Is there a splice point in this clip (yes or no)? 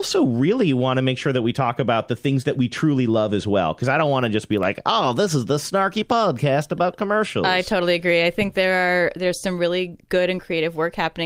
no